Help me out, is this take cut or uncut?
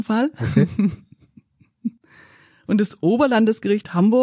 uncut